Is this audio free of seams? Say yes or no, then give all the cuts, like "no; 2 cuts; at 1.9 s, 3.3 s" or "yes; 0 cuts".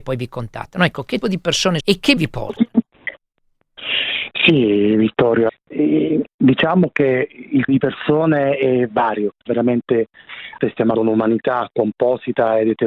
no; 9 cuts; at 1.2 s, 1.8 s, 2.2 s, 5.5 s, 7.7 s, 8.9 s, 9.5 s, 10.6 s, 10.9 s